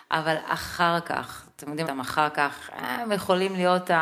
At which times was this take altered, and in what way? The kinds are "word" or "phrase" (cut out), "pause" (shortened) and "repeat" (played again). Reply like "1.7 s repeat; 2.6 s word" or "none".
1.8 s phrase

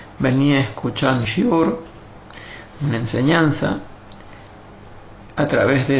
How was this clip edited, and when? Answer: 1.2 s word

